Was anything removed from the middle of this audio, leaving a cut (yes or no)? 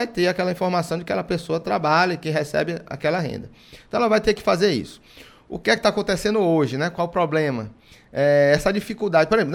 no